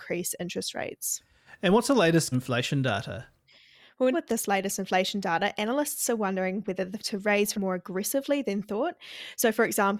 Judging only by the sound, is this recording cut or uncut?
cut